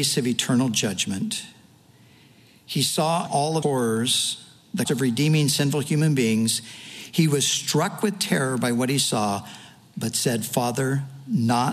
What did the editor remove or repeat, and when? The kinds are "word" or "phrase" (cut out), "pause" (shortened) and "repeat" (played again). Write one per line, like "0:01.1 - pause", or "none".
0:03.3 - word
0:03.6 - word
0:04.9 - word

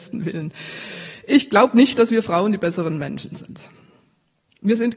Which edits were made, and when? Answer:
none

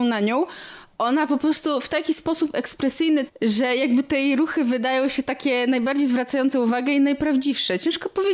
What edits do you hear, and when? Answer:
0:03.3 - word

